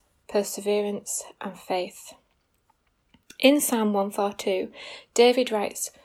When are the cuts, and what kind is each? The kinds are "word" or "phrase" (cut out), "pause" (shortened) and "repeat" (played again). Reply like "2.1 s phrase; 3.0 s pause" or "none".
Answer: none